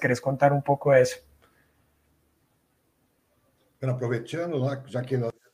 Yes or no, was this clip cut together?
no